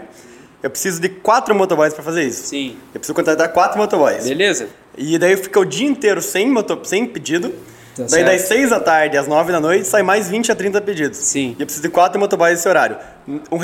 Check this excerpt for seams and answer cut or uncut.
uncut